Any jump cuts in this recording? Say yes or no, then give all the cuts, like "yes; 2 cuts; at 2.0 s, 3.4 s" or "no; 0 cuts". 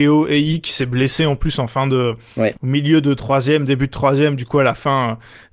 no; 0 cuts